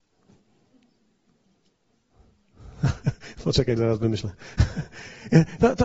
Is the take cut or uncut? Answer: cut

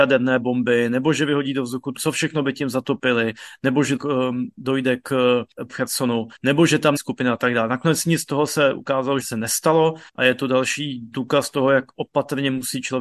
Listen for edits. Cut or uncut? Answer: cut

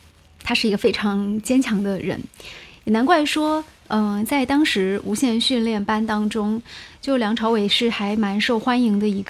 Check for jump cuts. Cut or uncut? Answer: uncut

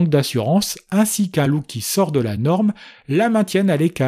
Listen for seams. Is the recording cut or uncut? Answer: uncut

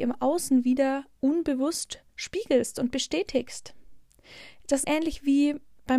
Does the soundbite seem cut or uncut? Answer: cut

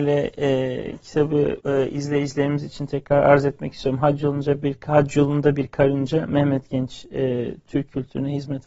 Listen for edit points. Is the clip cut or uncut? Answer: cut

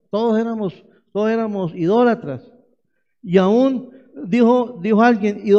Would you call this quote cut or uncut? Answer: uncut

